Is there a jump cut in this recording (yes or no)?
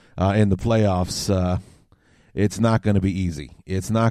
no